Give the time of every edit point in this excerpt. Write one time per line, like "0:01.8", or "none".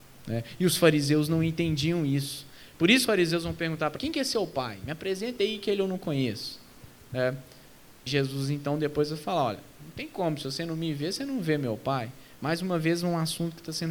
0:03.1
0:04.0
0:08.1